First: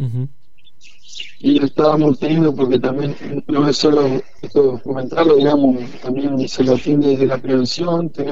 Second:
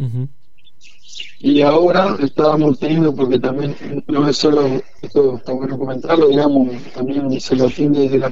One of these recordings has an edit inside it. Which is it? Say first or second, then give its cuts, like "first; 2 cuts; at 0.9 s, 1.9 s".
first; 2 cuts; at 1.6 s, 4.9 s